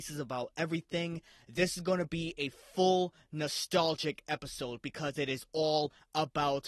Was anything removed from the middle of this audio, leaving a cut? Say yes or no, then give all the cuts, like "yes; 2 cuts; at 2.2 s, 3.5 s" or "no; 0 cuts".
no; 0 cuts